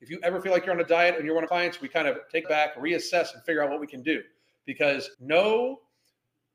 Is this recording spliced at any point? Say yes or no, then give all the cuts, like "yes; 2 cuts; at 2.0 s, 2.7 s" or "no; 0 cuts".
yes; 3 cuts; at 1.5 s, 2.4 s, 5.1 s